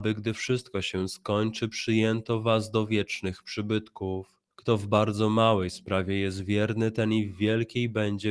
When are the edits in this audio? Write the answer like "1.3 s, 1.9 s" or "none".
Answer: 4.5 s